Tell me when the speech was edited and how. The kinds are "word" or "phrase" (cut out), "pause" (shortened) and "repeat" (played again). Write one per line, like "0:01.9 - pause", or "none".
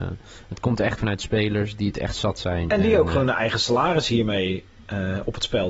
0:01.0 - word